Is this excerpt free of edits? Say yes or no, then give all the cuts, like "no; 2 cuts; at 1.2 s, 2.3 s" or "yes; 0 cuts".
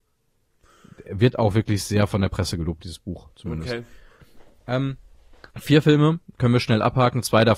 no; 1 cut; at 5.5 s